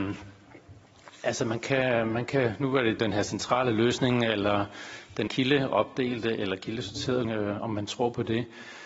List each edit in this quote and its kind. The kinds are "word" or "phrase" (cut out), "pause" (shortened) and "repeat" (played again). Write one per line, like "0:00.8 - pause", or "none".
0:03.0 - phrase
0:05.3 - word
0:07.2 - word